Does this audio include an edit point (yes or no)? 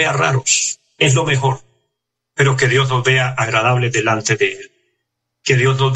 no